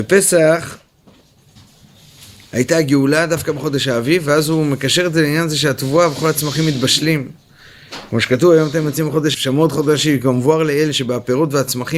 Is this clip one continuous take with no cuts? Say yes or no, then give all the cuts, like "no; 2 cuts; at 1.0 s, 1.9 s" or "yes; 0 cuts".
no; 1 cut; at 9.3 s